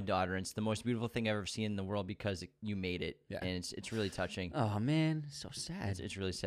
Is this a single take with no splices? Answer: yes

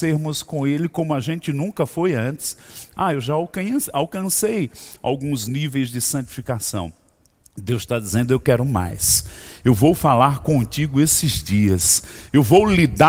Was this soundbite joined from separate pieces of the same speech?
no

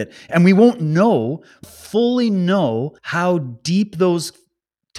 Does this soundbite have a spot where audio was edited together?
yes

